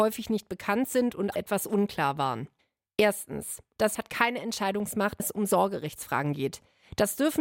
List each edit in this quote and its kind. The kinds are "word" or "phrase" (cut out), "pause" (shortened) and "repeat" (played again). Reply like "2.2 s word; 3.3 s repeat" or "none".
1.3 s word; 3.9 s word; 5.2 s word

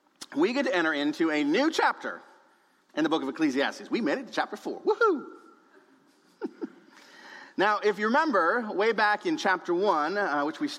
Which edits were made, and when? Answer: none

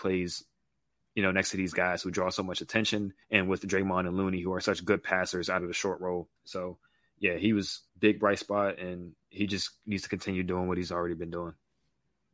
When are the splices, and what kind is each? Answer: 3.2 s pause; 6.4 s pause; 7.9 s pause; 9.2 s pause

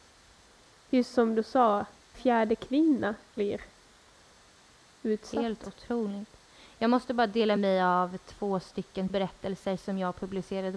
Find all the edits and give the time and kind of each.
2.1 s word; 3.4 s word; 7.6 s word; 9.1 s word

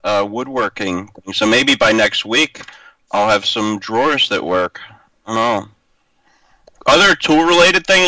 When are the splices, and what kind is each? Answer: none

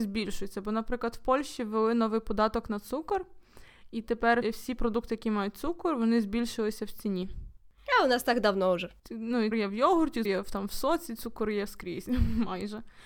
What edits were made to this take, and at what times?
4.4 s word; 9.0 s pause; 9.5 s word; 10.2 s word

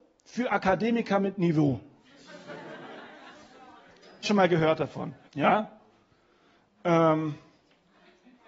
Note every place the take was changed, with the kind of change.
4.2 s word; 5.2 s pause

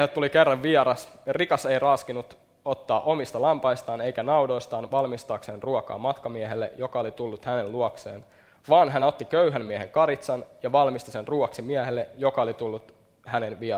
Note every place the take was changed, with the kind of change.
none

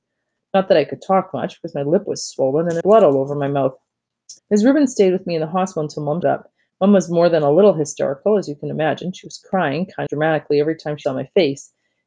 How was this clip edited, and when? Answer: 2.8 s word; 4.4 s pause; 6.2 s word; 10.1 s word; 11.0 s word

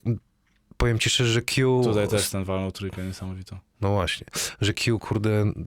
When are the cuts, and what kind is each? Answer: none

